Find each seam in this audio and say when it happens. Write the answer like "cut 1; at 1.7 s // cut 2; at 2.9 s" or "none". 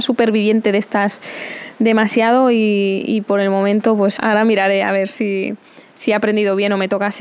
cut 1; at 4.2 s

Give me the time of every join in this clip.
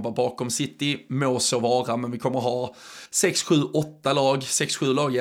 cut 1; at 3.1 s

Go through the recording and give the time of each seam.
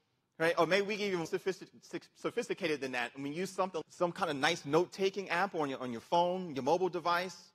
cut 1; at 1.3 s // cut 2; at 3.8 s

